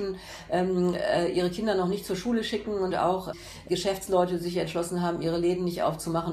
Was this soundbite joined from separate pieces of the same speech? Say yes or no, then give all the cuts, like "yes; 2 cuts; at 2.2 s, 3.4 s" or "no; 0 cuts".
no; 0 cuts